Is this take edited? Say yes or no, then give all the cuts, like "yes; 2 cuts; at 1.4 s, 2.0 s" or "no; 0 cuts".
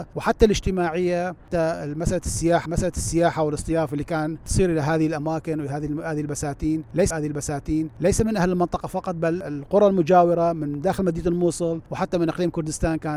yes; 2 cuts; at 2.7 s, 7.1 s